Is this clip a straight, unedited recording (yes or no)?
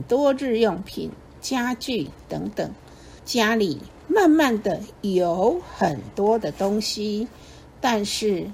no